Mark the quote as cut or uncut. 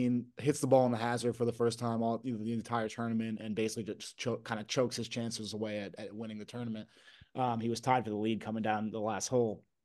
uncut